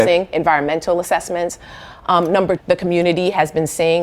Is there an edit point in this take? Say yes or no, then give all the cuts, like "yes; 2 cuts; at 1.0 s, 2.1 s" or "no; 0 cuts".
yes; 1 cut; at 2.6 s